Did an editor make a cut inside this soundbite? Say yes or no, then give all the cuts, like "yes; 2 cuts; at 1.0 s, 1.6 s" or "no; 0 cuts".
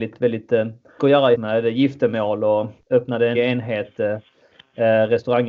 yes; 4 cuts; at 1.0 s, 1.3 s, 2.8 s, 3.3 s